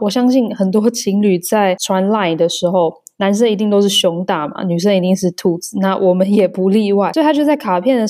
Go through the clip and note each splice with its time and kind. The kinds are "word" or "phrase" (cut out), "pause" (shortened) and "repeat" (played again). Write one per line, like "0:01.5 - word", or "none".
none